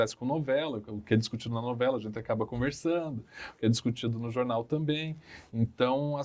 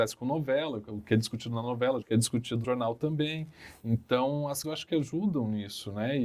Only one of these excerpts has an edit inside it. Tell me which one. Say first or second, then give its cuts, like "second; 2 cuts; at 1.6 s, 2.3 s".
second; 3 cuts; at 2.0 s, 2.6 s, 4.6 s